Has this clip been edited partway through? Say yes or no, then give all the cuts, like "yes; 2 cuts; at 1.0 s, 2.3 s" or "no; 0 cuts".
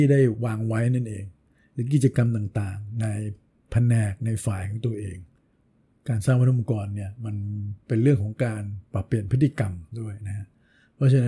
yes; 1 cut; at 7.8 s